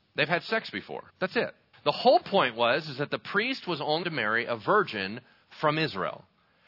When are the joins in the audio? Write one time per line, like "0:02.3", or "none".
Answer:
0:01.1
0:01.7
0:04.0